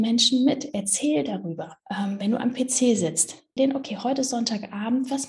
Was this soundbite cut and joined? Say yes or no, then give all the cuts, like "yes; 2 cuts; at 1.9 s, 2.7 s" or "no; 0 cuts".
yes; 2 cuts; at 1.8 s, 3.6 s